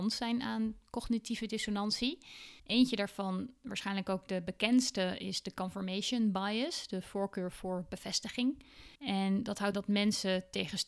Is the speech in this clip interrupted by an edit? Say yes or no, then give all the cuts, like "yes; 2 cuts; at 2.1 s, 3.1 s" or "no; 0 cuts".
yes; 3 cuts; at 2.6 s, 8.9 s, 9.7 s